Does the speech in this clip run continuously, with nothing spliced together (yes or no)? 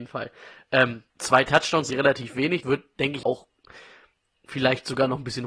no